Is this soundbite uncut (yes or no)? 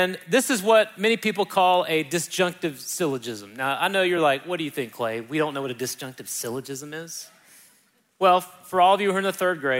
yes